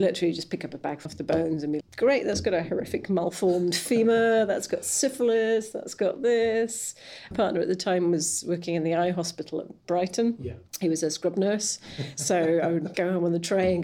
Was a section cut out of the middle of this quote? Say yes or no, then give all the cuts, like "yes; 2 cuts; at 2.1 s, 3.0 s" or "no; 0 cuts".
yes; 5 cuts; at 1.1 s, 1.8 s, 7.3 s, 10.7 s, 12.9 s